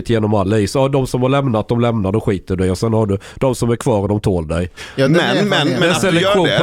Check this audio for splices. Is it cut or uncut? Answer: uncut